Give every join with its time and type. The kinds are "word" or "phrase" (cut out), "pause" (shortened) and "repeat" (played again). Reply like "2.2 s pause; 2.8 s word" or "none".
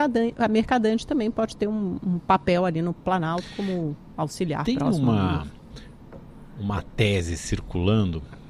none